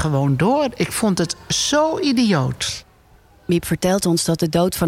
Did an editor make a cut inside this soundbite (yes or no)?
no